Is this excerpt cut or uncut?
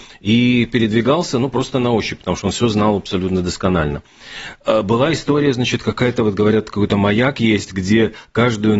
uncut